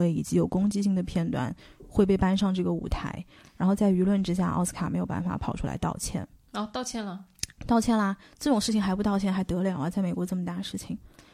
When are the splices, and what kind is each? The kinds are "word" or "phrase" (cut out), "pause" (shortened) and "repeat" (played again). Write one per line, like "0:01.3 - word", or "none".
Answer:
none